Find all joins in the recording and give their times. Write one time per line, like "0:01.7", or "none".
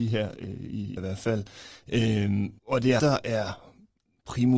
0:01.0
0:02.6
0:03.0